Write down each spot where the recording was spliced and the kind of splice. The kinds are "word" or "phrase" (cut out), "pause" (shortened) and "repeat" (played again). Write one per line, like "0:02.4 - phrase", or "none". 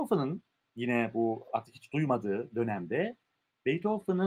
none